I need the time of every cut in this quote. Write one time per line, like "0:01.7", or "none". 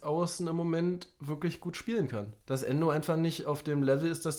0:02.4